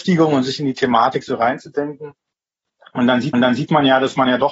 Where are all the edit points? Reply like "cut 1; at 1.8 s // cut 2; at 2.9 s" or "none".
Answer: cut 1; at 3.3 s

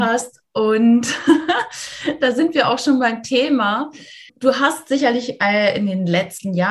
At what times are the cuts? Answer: cut 1; at 4.3 s

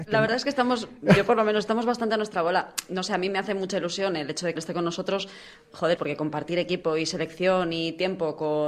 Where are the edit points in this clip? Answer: cut 1; at 4.6 s // cut 2; at 6.0 s

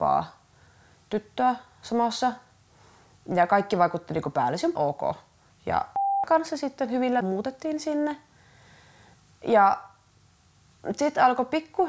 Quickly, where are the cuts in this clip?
cut 1; at 4.8 s // cut 2; at 7.2 s

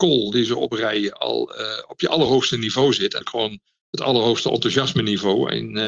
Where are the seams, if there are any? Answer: cut 1; at 3.2 s

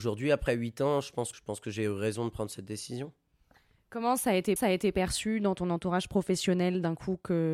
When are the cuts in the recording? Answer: cut 1; at 1.3 s // cut 2; at 4.6 s

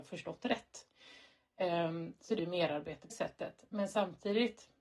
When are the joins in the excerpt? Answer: cut 1; at 2.4 s // cut 2; at 3.1 s

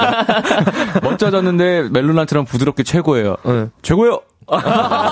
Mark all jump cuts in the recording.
none

